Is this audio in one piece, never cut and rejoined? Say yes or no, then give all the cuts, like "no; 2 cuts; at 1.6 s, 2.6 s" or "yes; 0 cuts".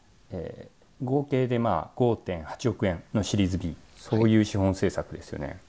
no; 2 cuts; at 3.1 s, 3.9 s